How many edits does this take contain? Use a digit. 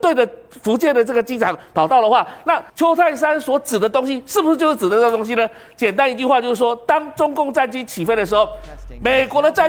1